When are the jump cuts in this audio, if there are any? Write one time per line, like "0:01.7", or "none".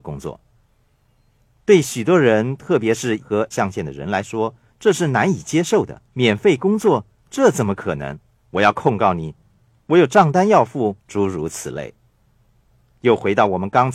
0:03.2
0:03.5
0:06.0
0:08.3
0:11.0